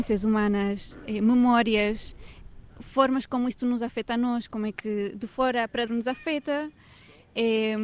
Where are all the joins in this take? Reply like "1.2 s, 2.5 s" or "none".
5.9 s